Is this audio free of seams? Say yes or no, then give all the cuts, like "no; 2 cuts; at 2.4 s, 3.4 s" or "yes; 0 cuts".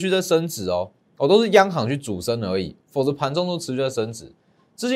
no; 2 cuts; at 1.1 s, 2.8 s